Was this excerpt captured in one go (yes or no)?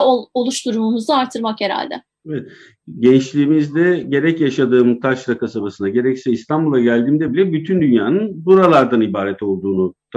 yes